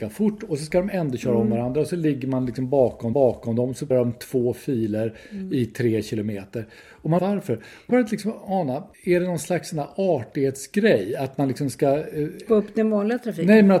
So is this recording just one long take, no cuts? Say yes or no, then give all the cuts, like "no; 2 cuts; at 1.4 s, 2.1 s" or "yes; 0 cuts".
no; 6 cuts; at 3.1 s, 3.9 s, 7.2 s, 7.9 s, 8.9 s, 12.5 s